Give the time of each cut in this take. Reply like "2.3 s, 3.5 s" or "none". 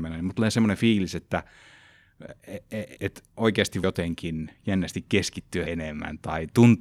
3.0 s, 3.8 s, 5.7 s